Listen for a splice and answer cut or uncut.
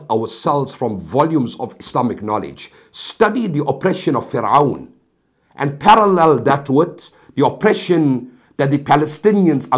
uncut